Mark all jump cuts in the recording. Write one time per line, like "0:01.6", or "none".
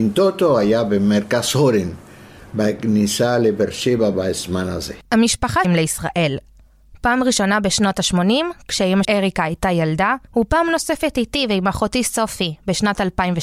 0:05.6
0:09.0
0:10.3